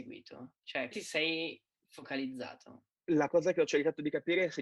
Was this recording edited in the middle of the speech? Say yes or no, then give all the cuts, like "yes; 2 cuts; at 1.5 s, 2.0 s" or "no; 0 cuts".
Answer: yes; 2 cuts; at 0.9 s, 3.3 s